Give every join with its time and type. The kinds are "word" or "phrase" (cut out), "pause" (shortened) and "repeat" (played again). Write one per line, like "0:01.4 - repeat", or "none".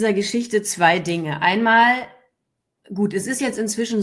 none